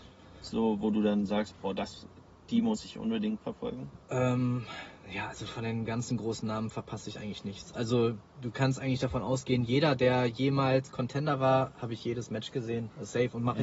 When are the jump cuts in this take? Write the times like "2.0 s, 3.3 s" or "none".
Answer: none